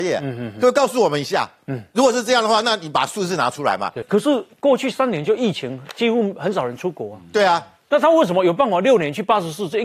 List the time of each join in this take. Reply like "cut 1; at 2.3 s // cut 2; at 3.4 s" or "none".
none